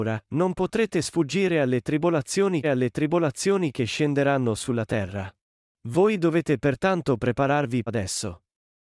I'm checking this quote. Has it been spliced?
yes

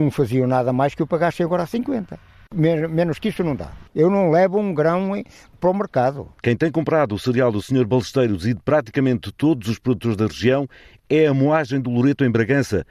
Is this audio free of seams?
yes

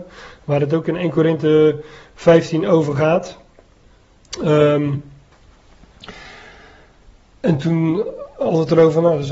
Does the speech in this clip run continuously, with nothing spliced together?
yes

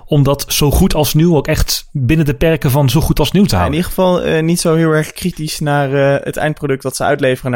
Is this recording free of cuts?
yes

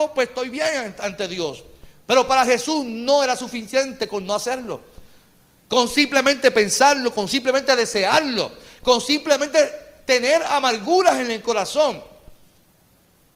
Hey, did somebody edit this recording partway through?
no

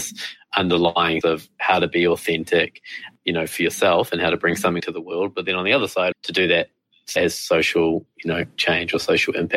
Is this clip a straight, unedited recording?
no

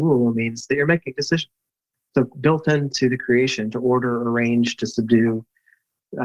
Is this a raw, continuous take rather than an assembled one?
yes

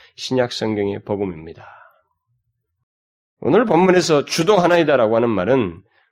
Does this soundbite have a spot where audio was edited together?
no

